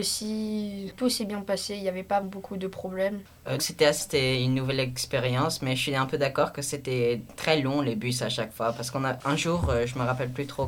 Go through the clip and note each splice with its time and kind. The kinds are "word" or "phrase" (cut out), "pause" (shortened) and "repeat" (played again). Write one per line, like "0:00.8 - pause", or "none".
0:02.2 - word
0:03.6 - word
0:04.0 - word